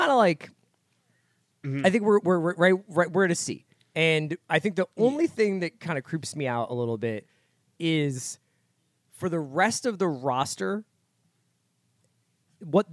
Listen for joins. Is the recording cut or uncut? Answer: uncut